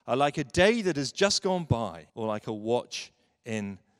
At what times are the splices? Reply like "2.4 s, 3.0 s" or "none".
2.1 s